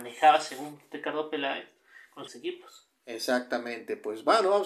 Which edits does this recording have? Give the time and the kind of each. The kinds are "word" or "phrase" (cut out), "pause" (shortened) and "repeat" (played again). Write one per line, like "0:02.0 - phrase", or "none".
0:02.3 - phrase